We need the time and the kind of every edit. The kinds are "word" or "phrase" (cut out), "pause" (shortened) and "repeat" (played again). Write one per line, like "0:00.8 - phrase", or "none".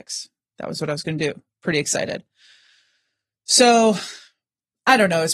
none